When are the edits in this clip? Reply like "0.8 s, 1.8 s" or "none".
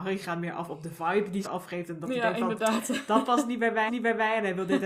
1.4 s, 3.9 s